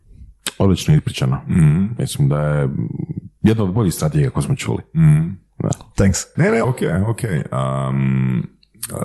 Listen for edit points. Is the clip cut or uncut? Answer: cut